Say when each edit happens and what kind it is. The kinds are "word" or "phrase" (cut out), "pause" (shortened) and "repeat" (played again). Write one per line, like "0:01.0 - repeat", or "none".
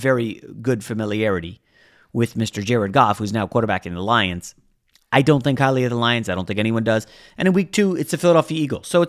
none